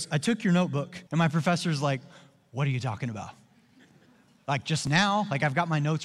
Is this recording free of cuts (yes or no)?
no